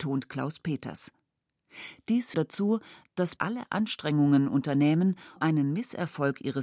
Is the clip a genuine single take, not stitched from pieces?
no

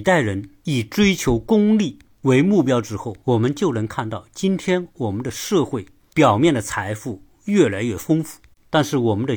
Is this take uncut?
no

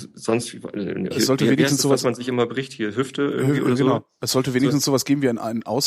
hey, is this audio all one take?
no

